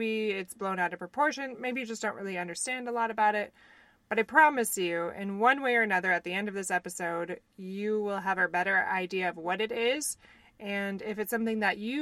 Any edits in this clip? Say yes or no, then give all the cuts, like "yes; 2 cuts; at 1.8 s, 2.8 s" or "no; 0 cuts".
no; 0 cuts